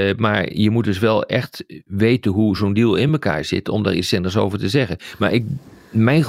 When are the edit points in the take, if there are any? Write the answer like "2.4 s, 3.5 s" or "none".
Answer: none